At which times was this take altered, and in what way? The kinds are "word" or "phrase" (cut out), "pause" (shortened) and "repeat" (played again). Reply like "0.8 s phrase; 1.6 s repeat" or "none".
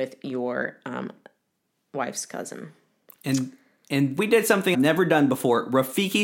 4.2 s word; 4.7 s word

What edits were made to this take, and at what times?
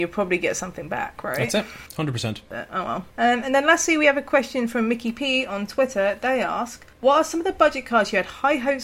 1.9 s pause; 3.1 s pause; 6.9 s pause

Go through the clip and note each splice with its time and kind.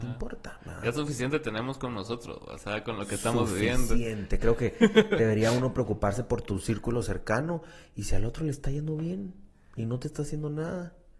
none

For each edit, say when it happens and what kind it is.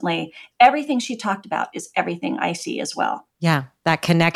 3.3 s pause

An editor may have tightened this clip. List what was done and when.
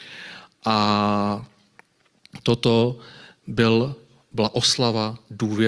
none

